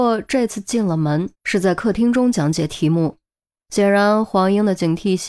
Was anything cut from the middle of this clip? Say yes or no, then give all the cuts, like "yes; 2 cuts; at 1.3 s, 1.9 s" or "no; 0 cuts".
yes; 1 cut; at 1.3 s